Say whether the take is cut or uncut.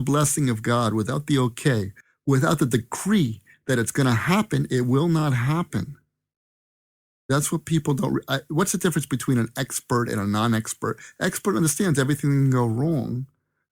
uncut